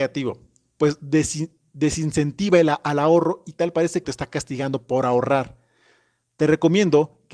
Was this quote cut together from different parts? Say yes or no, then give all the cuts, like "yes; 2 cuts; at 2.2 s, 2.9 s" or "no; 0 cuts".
yes; 1 cut; at 4.0 s